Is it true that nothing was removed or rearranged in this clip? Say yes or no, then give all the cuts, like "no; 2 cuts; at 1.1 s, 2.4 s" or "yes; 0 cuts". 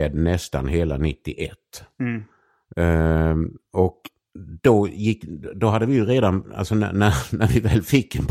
yes; 0 cuts